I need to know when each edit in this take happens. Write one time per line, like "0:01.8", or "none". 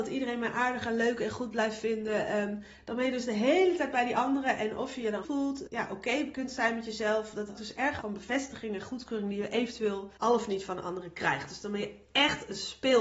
0:05.2
0:05.7
0:07.6
0:08.0
0:10.2